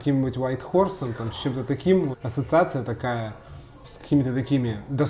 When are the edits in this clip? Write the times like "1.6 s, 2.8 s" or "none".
2.1 s, 3.8 s